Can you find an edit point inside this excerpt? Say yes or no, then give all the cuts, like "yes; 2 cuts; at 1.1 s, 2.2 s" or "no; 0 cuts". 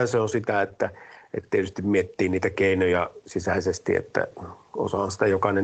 no; 0 cuts